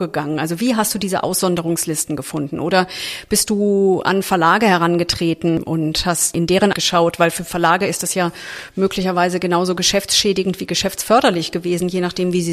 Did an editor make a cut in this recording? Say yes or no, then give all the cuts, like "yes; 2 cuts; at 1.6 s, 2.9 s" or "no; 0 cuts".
yes; 1 cut; at 6.7 s